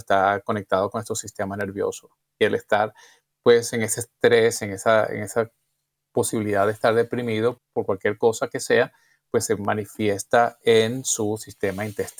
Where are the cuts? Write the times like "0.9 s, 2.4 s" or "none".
7.6 s